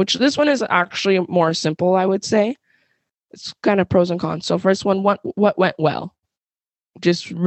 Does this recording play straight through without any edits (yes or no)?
yes